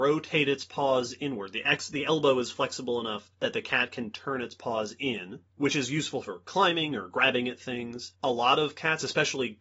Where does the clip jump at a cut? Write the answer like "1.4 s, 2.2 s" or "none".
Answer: 3.3 s, 5.5 s, 8.1 s